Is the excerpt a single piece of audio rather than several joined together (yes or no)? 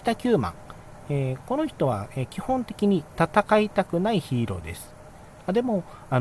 yes